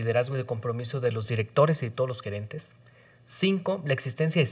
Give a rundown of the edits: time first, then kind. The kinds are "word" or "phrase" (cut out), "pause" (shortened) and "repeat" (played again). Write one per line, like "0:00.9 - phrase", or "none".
none